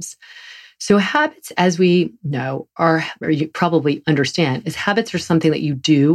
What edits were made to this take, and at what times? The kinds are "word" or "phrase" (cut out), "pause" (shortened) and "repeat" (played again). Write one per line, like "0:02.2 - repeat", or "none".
0:03.2 - word

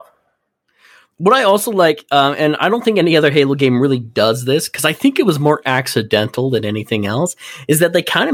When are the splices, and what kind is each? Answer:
none

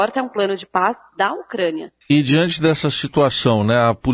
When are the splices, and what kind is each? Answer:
0:02.0 - pause

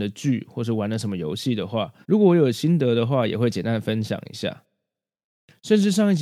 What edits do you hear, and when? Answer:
0:02.0 - pause

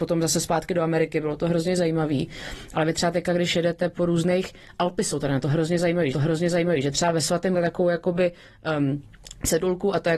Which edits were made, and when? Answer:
0:06.1 - repeat
0:07.5 - phrase

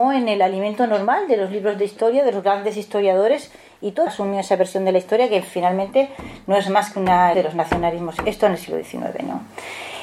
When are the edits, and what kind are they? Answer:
0:04.1 - word
0:07.3 - word
0:08.2 - word

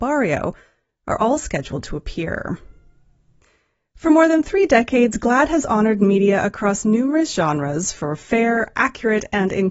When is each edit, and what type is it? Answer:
none

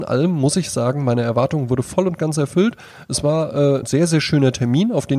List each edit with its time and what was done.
0:03.8 - word

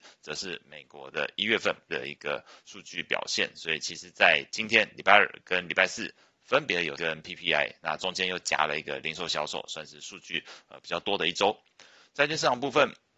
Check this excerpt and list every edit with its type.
0:01.9 - word
0:07.0 - word

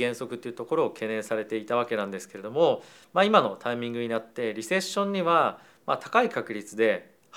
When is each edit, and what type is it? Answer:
none

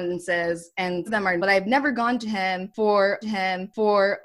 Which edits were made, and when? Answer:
0:01.1 - word
0:01.4 - word
0:03.2 - repeat

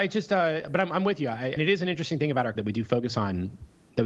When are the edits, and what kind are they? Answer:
0:01.6 - word
0:02.6 - word

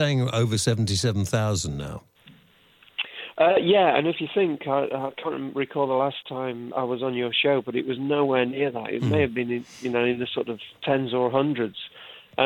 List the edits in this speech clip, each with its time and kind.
0:06.7 - word
0:10.8 - pause

